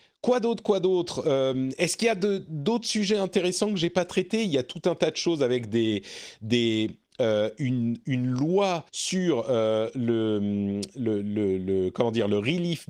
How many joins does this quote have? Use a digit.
1